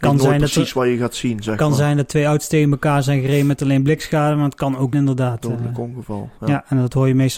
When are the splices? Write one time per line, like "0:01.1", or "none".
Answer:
0:04.9